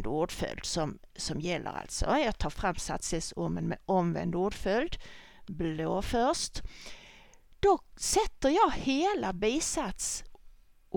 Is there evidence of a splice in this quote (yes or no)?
no